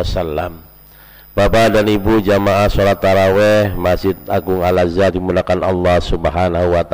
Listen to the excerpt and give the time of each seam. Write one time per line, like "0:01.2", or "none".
0:05.1